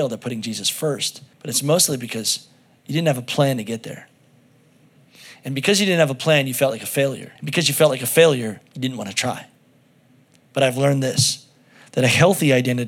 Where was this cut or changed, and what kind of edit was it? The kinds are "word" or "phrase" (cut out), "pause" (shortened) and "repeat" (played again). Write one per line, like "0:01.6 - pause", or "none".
0:01.3 - pause
0:07.4 - pause
0:08.7 - pause